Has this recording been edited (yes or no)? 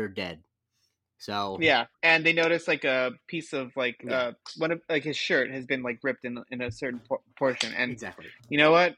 yes